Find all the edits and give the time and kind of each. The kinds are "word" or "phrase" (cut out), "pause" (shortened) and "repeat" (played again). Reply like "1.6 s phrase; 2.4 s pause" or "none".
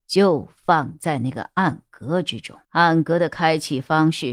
2.6 s pause